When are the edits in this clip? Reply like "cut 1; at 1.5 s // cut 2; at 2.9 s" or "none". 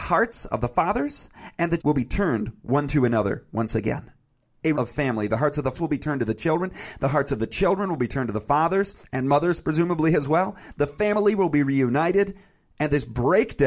cut 1; at 1.8 s // cut 2; at 4.7 s // cut 3; at 5.7 s